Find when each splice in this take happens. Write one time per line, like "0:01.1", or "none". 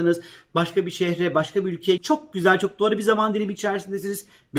0:02.0